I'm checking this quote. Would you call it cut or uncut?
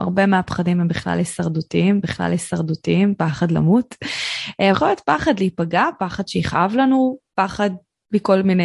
cut